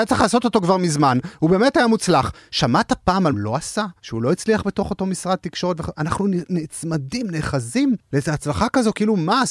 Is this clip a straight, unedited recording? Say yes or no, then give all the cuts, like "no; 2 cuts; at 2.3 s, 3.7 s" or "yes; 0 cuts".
no; 2 cuts; at 3.3 s, 4.0 s